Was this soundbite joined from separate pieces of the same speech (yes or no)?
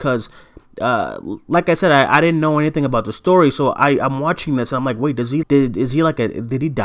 yes